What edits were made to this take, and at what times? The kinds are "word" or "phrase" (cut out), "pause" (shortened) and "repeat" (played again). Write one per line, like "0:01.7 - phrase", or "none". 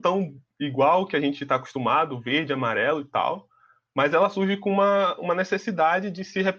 none